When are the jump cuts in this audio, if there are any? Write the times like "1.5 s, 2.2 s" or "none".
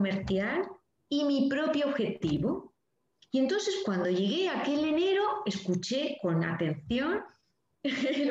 none